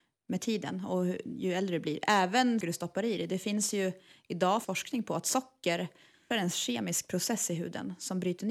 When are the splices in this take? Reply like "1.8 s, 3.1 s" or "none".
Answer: 2.6 s, 4.6 s, 6.3 s